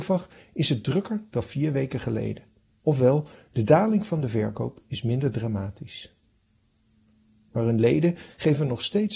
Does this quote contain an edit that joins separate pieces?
no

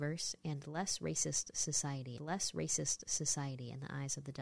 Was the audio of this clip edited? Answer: yes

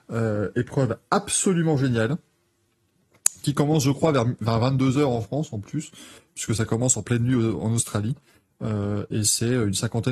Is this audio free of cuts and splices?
yes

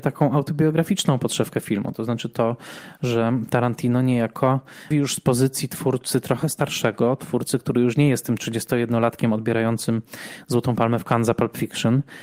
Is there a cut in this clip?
yes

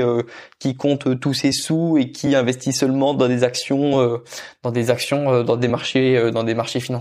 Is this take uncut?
yes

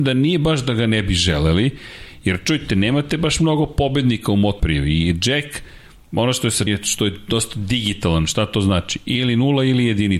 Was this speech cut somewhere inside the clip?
yes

